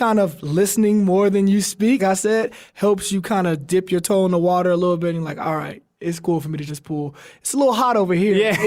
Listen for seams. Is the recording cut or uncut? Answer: cut